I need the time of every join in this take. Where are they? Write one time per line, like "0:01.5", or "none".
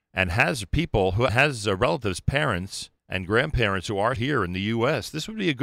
0:01.3
0:03.0
0:04.2